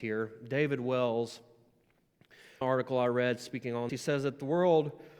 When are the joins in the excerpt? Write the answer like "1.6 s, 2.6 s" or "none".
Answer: 2.6 s, 3.9 s

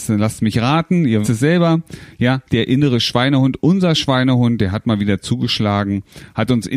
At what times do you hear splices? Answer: 1.2 s, 2.5 s

